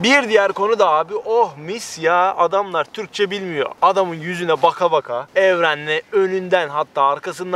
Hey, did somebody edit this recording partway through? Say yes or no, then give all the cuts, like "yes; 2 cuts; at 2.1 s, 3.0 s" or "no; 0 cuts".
no; 0 cuts